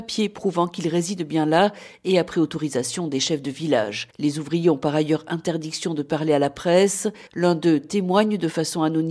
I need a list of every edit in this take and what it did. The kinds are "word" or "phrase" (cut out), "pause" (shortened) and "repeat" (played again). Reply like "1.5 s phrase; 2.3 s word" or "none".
4.1 s pause; 7.3 s pause